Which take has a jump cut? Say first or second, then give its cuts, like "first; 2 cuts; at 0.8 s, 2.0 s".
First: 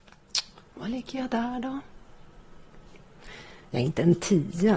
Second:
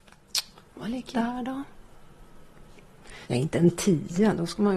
second; 2 cuts; at 1.1 s, 3.2 s